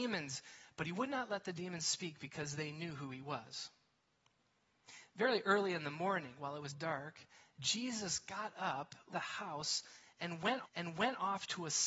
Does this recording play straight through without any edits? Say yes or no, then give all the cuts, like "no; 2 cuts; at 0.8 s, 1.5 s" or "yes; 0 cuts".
no; 3 cuts; at 6.7 s, 9.1 s, 10.6 s